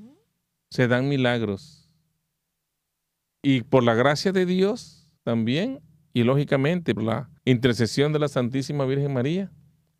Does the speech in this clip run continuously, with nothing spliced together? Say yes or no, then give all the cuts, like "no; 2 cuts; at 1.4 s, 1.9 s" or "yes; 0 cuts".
no; 3 cuts; at 5.2 s, 7.0 s, 7.4 s